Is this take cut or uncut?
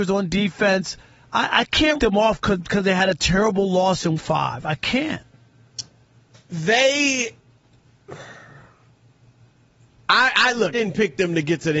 cut